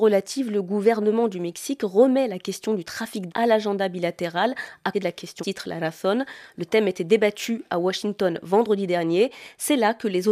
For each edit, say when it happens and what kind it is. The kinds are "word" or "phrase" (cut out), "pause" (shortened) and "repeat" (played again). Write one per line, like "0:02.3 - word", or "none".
0:03.3 - word
0:04.9 - word
0:05.4 - word